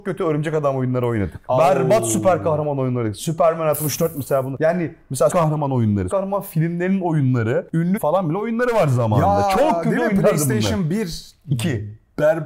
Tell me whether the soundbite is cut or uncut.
cut